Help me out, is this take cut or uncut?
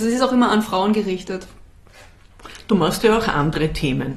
uncut